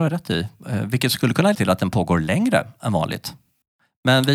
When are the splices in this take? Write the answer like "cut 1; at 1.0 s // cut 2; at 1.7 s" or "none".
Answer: cut 1; at 1.5 s